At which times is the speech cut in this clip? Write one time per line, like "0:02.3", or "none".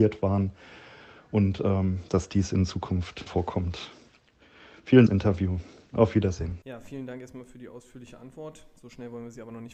0:02.1
0:03.3
0:05.1
0:06.6

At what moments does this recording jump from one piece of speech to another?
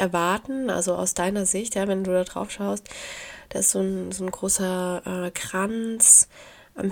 none

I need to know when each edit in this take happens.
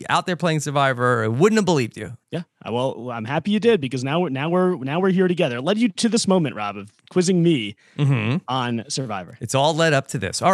0:02.2

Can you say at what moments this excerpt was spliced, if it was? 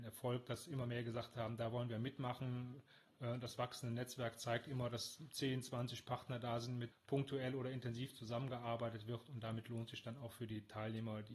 0:06.9

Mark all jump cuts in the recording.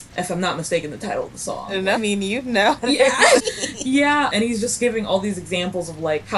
0:02.0
0:03.4

